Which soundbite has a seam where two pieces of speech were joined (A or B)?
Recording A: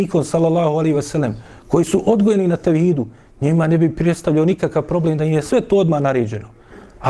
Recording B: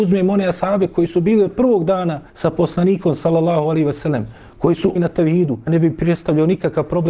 B